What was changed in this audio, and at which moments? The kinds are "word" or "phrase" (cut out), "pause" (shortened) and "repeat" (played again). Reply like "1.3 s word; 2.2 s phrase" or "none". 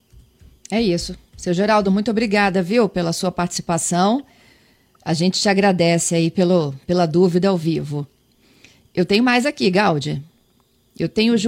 none